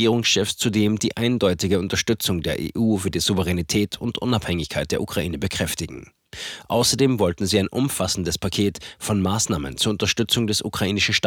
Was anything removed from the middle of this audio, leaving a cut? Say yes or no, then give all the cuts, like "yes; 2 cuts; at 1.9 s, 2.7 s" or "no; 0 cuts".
no; 0 cuts